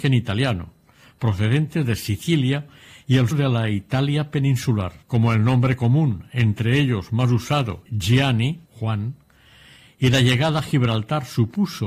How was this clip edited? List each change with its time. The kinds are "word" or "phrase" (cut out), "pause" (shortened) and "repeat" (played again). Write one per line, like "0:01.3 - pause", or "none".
0:03.3 - word
0:05.0 - pause
0:07.9 - phrase
0:08.7 - pause

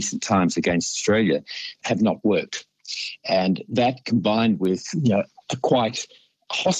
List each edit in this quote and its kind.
none

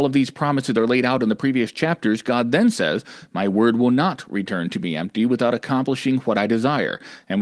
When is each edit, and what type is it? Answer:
none

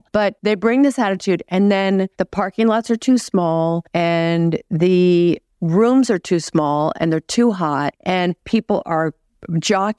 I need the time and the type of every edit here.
none

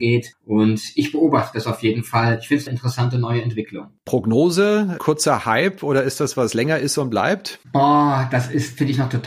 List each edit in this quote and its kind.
0:02.7 - phrase
0:06.3 - word
0:07.6 - pause

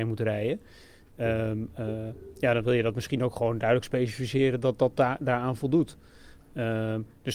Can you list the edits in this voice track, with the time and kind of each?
none

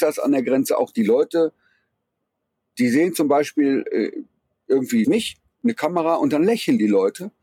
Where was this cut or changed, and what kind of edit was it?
0:05.0 - word

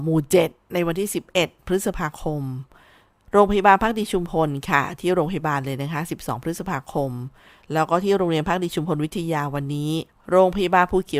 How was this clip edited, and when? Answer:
0:10.1 - pause

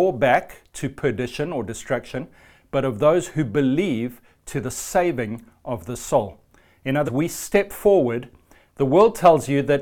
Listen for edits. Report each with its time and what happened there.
0:07.1 - word

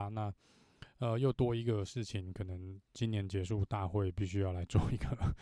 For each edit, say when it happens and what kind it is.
0:02.9 - pause

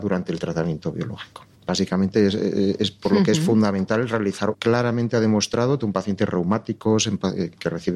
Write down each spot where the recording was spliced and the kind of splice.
0:01.5 - pause
0:04.5 - phrase
0:05.8 - word

